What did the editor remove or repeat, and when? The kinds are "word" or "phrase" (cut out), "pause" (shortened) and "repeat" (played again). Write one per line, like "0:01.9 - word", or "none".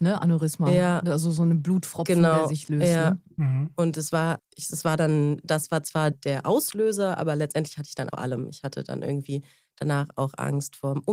0:04.4 - word
0:06.1 - word
0:08.1 - word